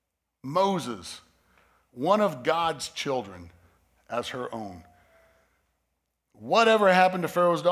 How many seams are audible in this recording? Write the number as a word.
zero